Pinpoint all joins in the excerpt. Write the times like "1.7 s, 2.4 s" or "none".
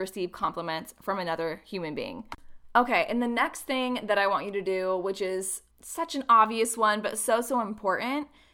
5.7 s